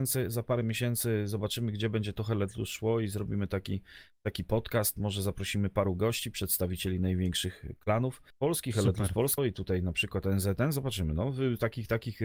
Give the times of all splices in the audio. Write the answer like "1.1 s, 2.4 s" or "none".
8.3 s, 9.4 s